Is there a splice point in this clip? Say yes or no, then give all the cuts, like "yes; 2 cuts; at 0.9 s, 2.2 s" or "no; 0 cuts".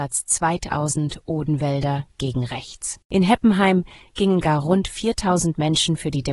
yes; 1 cut; at 3.0 s